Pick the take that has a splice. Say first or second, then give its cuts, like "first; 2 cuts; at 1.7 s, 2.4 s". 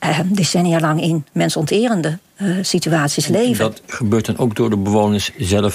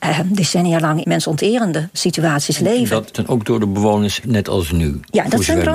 second; 4 cuts; at 1.0 s, 1.9 s, 3.1 s, 4.2 s